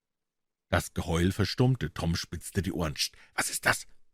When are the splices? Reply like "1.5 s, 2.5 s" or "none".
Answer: none